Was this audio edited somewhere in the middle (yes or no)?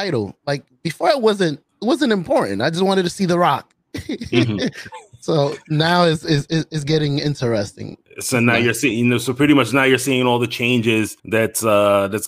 yes